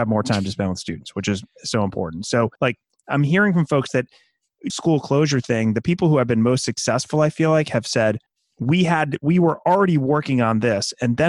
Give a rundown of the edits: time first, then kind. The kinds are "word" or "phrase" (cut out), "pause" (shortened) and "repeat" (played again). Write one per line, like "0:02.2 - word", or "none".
0:02.5 - pause
0:04.7 - phrase
0:08.3 - pause